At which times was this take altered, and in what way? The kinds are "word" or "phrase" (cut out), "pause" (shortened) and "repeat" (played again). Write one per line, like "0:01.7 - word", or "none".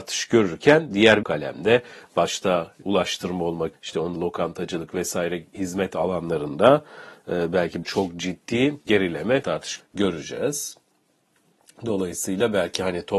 0:01.2 - word
0:02.8 - word
0:03.7 - word
0:04.1 - word
0:05.5 - word
0:07.8 - word
0:08.9 - word
0:09.4 - word
0:09.8 - word

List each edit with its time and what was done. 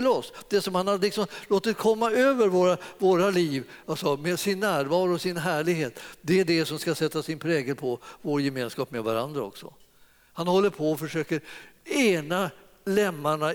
none

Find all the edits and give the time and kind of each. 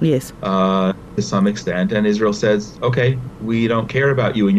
none

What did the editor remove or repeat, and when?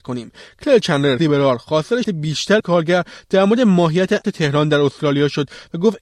0:01.2 - word
0:02.0 - word
0:02.6 - word
0:04.2 - word

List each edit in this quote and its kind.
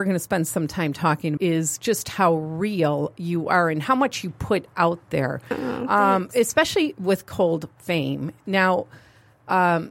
0:01.4 - word

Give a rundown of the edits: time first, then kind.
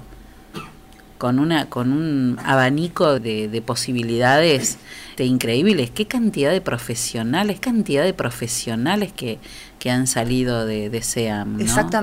0:03.2 - word
0:05.2 - word
0:07.6 - repeat

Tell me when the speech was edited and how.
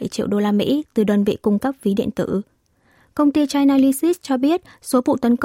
none

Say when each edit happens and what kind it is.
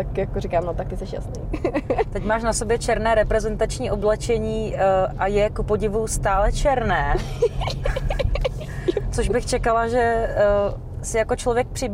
none

